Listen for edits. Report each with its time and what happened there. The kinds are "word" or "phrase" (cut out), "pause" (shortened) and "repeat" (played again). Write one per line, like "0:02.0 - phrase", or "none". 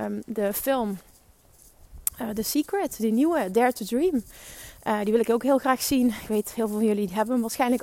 none